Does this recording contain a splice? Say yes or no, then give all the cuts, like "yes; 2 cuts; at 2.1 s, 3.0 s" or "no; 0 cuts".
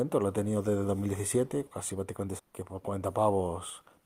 yes; 2 cuts; at 1.7 s, 2.4 s